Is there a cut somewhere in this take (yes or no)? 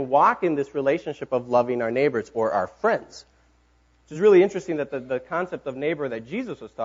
no